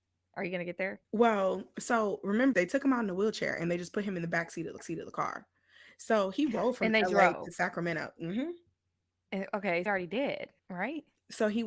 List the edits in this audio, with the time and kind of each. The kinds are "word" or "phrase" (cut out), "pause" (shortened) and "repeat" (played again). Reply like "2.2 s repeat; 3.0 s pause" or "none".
1.0 s pause; 2.5 s word; 4.8 s repeat; 9.9 s phrase; 10.6 s pause